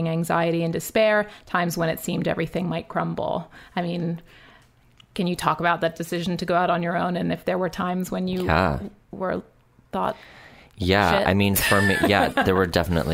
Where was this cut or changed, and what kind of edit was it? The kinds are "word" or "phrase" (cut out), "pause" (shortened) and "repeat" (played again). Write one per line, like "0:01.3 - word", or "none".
none